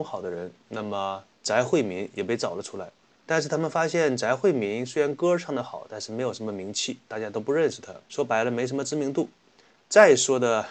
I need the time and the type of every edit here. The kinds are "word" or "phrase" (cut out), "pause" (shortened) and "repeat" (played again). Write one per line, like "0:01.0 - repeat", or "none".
0:01.3 - pause
0:03.1 - pause
0:07.0 - pause
0:08.0 - pause